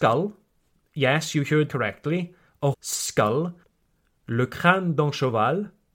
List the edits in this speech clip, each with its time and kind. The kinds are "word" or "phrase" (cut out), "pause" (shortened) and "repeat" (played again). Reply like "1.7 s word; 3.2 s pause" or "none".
1.7 s word; 2.7 s word